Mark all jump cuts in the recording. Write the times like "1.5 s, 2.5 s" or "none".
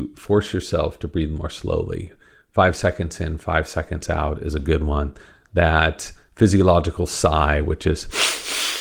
none